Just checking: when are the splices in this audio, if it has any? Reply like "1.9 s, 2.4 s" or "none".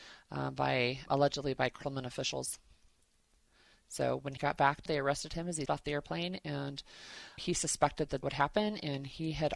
1.1 s, 4.4 s, 4.9 s, 5.7 s, 7.4 s, 8.2 s